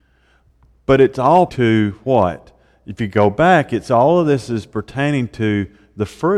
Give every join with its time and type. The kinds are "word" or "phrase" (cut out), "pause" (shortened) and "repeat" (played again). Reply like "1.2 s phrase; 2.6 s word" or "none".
1.5 s word